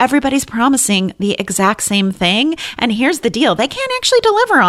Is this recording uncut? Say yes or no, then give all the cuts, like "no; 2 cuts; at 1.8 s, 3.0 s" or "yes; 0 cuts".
yes; 0 cuts